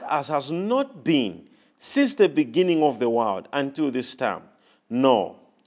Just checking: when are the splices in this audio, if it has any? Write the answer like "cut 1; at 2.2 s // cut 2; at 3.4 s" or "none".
none